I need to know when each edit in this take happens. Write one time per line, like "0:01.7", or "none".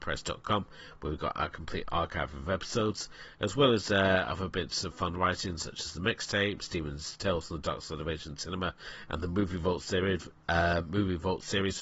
none